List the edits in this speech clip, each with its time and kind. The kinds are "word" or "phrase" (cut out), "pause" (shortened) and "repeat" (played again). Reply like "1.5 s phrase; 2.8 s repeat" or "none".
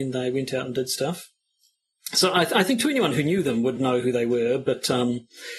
none